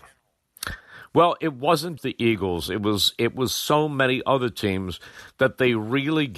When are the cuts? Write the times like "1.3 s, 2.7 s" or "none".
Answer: 2.0 s